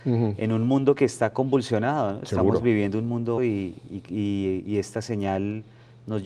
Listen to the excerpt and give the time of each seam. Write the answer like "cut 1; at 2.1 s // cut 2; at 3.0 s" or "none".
cut 1; at 3.4 s